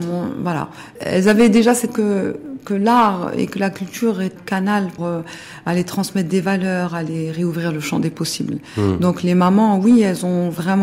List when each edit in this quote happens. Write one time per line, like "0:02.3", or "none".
0:01.0
0:01.9
0:04.4
0:05.0